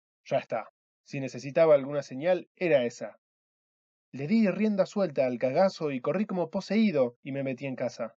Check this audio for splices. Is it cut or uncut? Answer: uncut